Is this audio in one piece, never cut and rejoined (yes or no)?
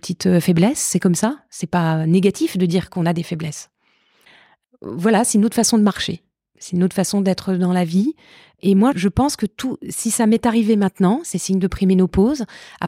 no